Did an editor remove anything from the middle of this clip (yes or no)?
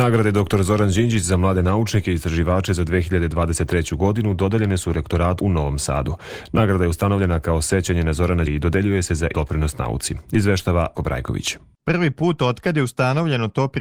yes